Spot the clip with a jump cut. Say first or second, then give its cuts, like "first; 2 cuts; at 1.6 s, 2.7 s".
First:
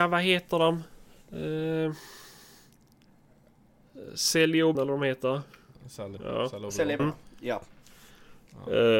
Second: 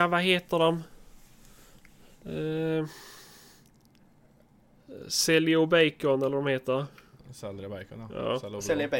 first; 4 cuts; at 1.1 s, 4.7 s, 6.2 s, 7.0 s